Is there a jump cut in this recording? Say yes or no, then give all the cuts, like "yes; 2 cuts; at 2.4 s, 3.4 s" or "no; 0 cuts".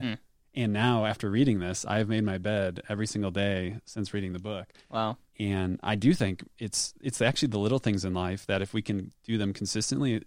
no; 0 cuts